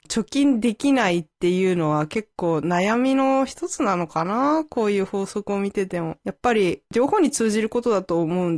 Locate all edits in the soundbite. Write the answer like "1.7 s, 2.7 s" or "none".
6.2 s